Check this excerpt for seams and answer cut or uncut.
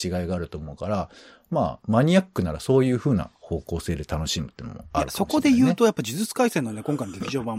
uncut